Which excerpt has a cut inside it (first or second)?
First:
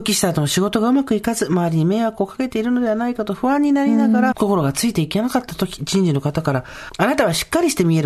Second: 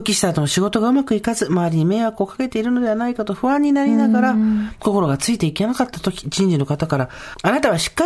first